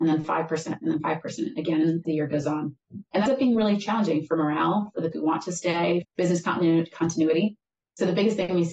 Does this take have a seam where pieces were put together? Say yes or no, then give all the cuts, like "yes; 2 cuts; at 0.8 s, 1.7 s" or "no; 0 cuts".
yes; 4 cuts; at 2.0 s, 3.3 s, 5.1 s, 6.0 s